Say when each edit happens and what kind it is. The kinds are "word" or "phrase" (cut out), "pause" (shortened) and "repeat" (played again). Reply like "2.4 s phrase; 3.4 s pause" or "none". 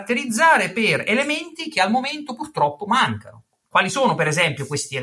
none